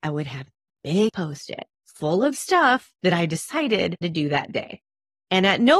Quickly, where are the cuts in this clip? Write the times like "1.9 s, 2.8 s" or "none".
1.1 s, 1.7 s, 4.0 s